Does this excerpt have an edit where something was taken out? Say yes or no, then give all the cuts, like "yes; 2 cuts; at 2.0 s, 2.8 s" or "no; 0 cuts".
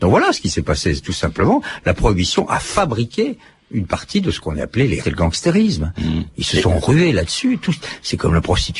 yes; 1 cut; at 5.0 s